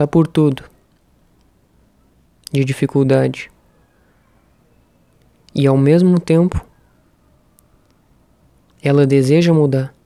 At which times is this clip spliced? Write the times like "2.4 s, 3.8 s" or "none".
none